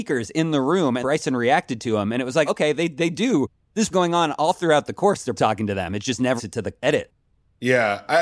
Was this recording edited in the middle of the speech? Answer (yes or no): yes